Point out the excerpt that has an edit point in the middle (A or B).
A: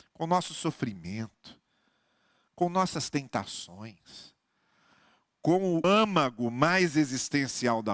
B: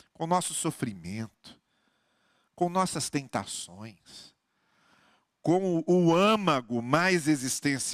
A